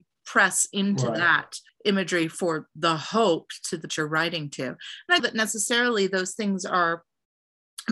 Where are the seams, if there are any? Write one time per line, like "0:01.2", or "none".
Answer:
0:01.7
0:03.9
0:05.2